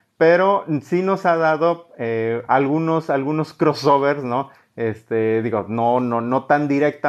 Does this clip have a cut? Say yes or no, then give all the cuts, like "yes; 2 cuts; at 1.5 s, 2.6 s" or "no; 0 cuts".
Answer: no; 0 cuts